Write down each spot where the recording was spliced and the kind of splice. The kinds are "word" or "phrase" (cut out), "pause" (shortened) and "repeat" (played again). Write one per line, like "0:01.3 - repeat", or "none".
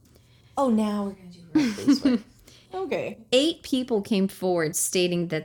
none